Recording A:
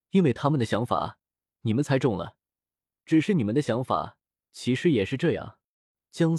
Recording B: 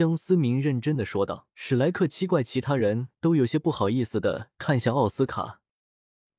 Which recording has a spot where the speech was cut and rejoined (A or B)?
B